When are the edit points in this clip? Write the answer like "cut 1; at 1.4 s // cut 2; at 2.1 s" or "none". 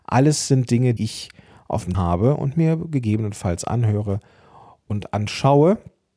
cut 1; at 1.0 s // cut 2; at 1.9 s